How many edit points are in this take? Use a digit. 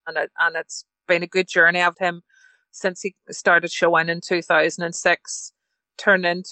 1